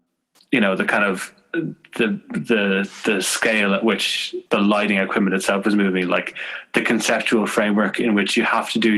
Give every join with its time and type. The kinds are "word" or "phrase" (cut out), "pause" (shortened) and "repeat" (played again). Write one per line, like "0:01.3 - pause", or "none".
0:04.5 - pause